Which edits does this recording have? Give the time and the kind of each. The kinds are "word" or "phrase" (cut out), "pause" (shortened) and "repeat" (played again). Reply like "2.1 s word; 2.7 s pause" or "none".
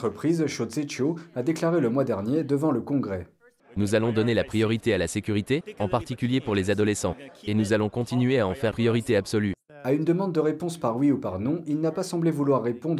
3.6 s pause; 8.7 s word